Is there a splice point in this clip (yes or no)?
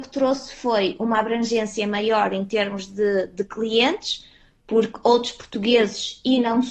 no